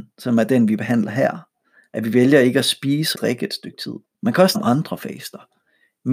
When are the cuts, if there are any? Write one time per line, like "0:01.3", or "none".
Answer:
0:03.1
0:04.0
0:04.5